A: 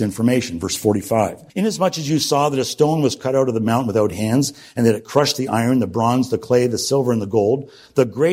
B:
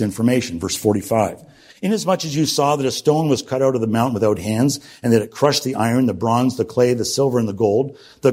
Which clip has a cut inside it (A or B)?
A